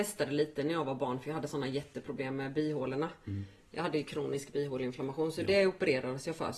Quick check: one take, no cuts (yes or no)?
yes